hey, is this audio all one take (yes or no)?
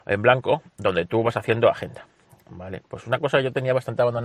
yes